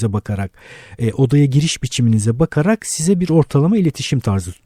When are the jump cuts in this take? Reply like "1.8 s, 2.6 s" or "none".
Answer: none

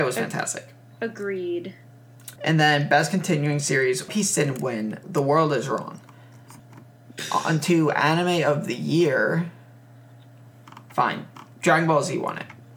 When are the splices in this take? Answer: 2.4 s, 4.1 s, 5.0 s, 6.6 s

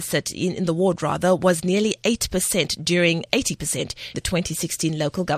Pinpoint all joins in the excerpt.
4.1 s

